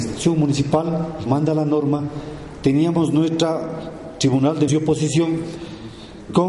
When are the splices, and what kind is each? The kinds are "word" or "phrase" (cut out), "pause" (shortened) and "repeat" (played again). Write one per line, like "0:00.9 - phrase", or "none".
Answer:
0:01.3 - word
0:04.7 - word